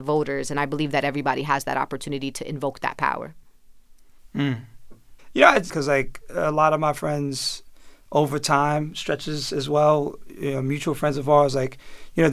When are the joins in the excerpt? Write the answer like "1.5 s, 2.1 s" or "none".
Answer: 5.7 s